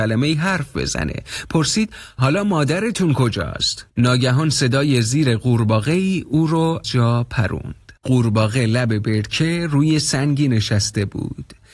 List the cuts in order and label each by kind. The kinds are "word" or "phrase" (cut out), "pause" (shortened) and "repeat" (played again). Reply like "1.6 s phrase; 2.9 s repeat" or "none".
3.9 s pause; 6.8 s word; 8.0 s pause